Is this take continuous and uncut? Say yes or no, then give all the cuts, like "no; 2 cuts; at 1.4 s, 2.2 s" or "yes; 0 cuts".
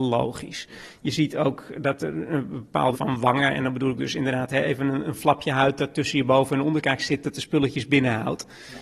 no; 1 cut; at 2.9 s